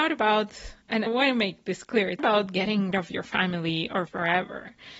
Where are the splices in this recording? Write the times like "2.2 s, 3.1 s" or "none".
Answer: 1.1 s, 2.2 s, 2.9 s, 4.1 s

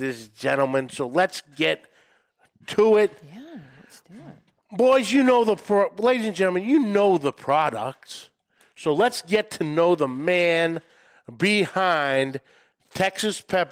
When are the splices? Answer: none

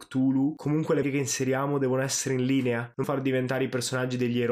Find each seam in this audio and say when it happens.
1.0 s, 3.0 s

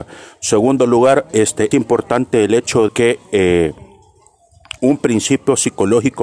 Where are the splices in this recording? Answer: 1.7 s, 2.9 s, 4.8 s

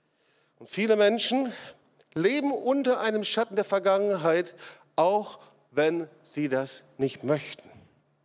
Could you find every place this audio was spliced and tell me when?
none

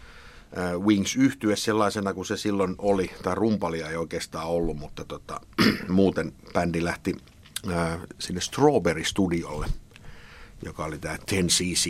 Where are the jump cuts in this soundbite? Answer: 8.1 s

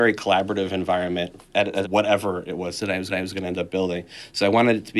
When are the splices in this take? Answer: 1.8 s, 3.1 s

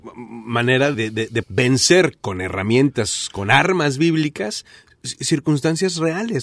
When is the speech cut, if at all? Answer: 0.9 s, 1.4 s

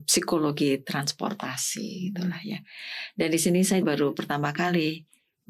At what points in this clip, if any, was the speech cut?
3.8 s

